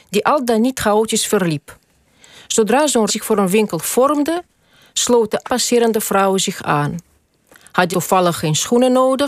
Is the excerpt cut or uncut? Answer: cut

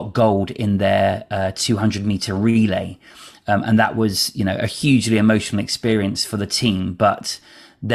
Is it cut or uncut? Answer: uncut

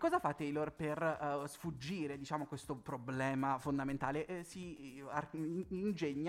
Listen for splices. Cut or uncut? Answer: uncut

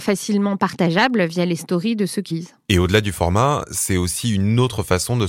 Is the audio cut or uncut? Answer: cut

